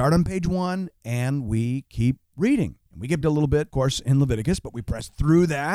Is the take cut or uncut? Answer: cut